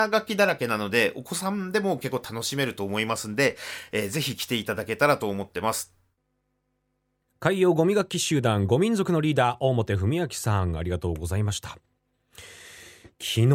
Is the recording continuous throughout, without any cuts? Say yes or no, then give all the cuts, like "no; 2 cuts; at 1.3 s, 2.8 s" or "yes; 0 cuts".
yes; 0 cuts